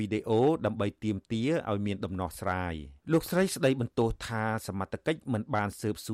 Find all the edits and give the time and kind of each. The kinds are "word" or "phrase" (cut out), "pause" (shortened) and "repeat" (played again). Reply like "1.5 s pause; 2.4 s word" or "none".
3.0 s pause